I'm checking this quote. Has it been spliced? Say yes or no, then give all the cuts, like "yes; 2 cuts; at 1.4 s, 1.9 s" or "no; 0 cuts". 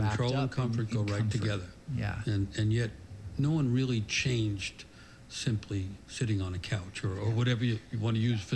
no; 0 cuts